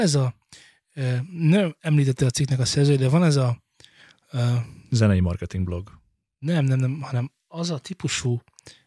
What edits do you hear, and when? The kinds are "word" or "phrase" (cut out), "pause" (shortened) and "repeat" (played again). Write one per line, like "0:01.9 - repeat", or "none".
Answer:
none